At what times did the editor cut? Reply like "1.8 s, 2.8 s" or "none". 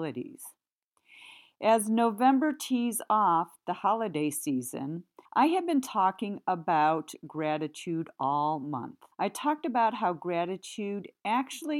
5.2 s, 9.1 s